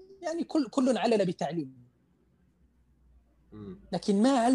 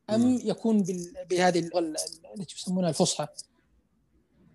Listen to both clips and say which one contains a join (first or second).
second